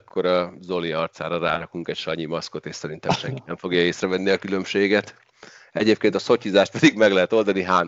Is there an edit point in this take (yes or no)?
no